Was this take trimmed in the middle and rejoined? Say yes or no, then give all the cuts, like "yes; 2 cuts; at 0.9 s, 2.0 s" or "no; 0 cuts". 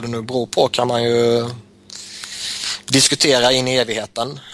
no; 0 cuts